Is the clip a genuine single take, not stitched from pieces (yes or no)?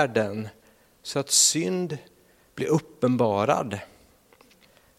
yes